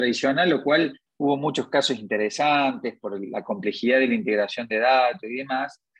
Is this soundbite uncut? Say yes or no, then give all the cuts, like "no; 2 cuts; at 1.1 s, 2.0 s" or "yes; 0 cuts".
no; 1 cut; at 1.1 s